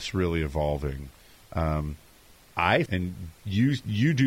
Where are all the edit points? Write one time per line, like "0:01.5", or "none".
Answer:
0:02.9